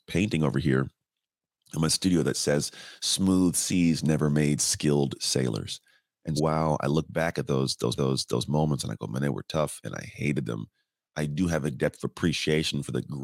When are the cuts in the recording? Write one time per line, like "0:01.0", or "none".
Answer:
0:06.4
0:08.0